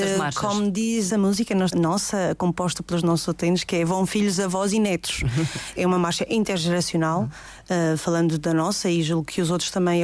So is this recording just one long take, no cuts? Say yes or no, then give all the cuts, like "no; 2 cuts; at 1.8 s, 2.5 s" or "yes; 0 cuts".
no; 3 cuts; at 1.1 s, 1.7 s, 5.8 s